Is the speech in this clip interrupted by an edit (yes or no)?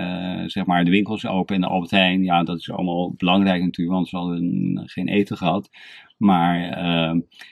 no